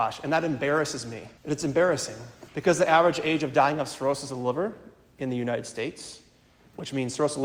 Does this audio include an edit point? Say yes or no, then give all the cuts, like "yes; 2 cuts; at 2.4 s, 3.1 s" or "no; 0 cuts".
yes; 2 cuts; at 1.4 s, 2.5 s